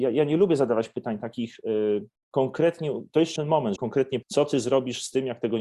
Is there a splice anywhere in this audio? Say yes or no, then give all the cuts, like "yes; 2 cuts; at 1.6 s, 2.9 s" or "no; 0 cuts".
yes; 4 cuts; at 2.2 s, 3.4 s, 3.8 s, 4.2 s